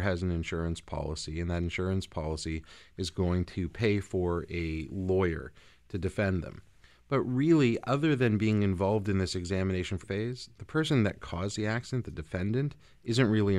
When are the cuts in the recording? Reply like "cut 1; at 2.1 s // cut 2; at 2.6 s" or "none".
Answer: cut 1; at 10.0 s